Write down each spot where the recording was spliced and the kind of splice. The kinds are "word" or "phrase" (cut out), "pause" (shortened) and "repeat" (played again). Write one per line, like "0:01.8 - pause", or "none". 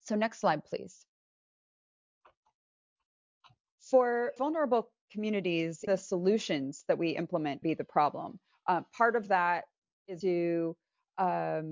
0:04.4 - word
0:05.9 - word
0:07.6 - word
0:10.2 - word